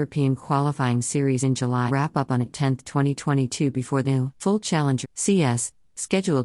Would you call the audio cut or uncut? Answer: cut